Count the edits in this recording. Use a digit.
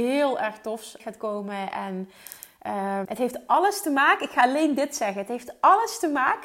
2